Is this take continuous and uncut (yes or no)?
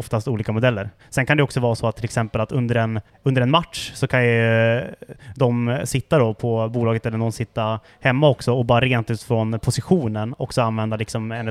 no